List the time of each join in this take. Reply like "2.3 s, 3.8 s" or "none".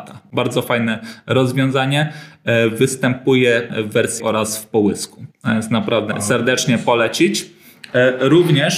3.7 s, 4.2 s, 5.3 s, 6.1 s